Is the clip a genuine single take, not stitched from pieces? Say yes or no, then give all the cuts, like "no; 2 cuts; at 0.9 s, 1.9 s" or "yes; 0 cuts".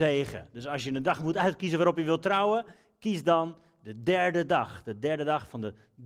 yes; 0 cuts